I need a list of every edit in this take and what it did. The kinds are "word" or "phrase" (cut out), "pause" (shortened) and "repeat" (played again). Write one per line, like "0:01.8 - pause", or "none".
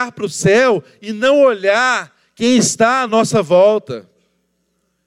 none